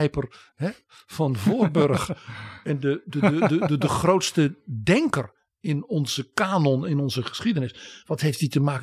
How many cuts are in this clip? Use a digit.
0